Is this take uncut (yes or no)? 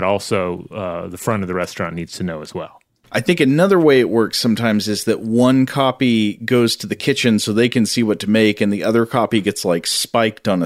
yes